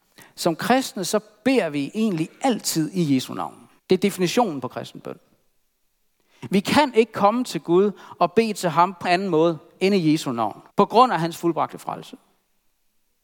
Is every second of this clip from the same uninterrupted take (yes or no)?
no